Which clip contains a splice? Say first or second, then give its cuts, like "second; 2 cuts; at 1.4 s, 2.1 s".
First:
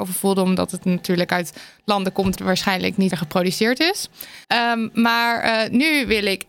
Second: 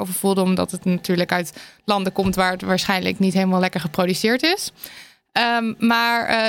first; 3 cuts; at 2.4 s, 3.1 s, 4.4 s